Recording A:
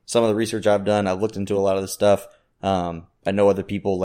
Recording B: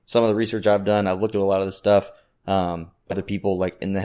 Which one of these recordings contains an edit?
B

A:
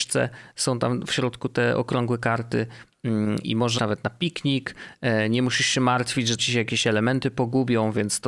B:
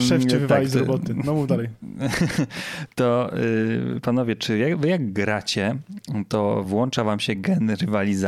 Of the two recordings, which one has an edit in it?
A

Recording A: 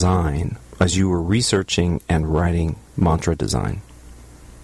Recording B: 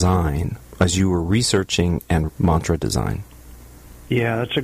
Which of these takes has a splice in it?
B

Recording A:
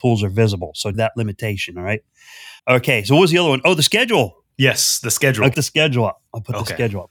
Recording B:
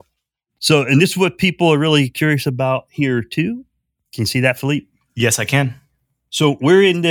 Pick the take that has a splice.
A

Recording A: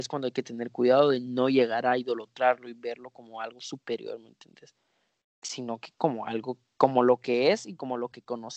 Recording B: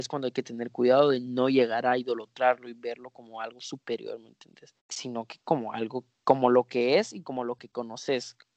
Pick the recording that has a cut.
B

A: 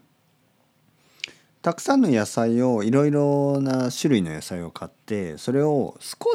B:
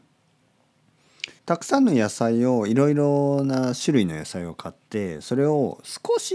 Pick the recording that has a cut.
B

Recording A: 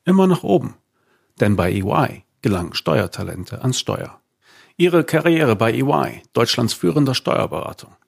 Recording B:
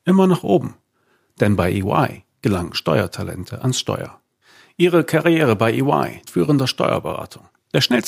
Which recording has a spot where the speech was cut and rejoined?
B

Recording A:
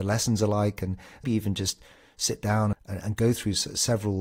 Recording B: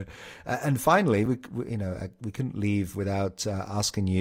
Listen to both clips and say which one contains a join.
A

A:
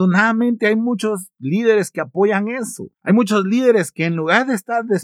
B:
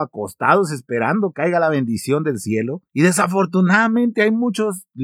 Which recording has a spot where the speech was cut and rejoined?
B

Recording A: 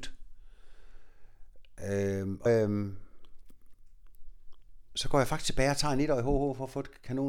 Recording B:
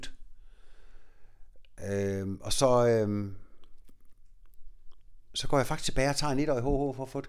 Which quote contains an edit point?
A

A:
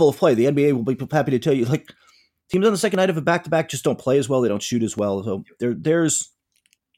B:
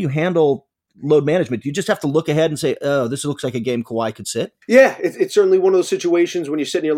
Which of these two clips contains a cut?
B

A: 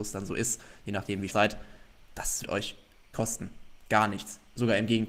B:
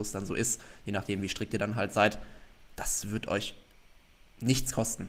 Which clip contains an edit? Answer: A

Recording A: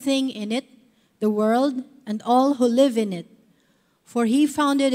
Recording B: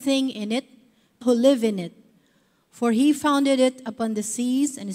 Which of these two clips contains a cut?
B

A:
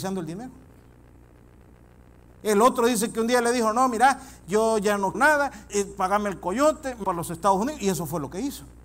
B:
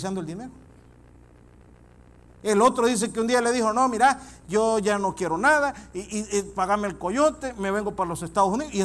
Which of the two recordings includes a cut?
A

